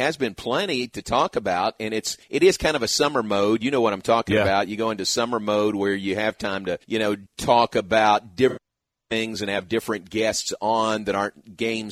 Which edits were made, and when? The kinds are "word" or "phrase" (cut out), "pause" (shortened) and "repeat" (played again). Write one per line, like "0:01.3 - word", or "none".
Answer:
0:02.2 - pause
0:06.8 - pause
0:07.3 - pause